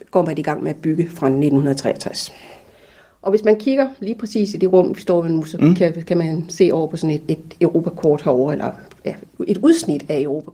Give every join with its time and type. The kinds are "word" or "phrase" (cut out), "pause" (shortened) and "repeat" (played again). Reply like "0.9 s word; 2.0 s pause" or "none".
7.3 s word